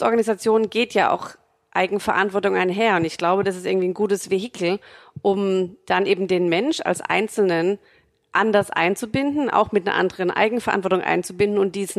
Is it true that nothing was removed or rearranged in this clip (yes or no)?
yes